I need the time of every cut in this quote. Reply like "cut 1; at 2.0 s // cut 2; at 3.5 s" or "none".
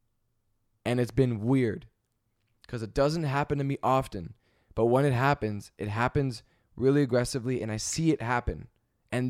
none